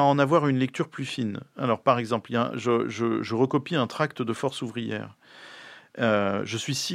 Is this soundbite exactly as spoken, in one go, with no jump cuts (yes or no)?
yes